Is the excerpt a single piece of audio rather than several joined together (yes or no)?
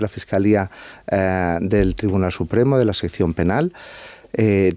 yes